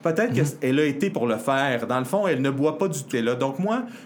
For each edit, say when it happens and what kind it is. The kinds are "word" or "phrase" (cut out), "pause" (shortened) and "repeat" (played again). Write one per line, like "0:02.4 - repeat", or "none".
0:01.1 - word
0:03.1 - word